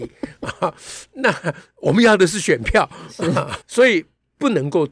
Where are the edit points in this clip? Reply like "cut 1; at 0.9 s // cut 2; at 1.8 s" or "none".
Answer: cut 1; at 3.6 s